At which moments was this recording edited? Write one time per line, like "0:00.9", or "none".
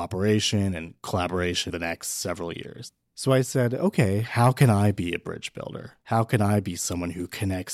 0:01.7
0:06.0